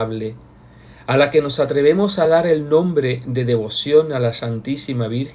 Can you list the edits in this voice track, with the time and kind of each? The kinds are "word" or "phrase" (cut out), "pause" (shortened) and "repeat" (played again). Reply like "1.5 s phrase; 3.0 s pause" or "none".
none